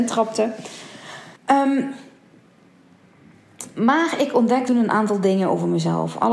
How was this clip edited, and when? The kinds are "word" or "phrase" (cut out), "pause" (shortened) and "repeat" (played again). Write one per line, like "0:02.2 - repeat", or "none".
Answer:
0:01.4 - pause
0:04.7 - word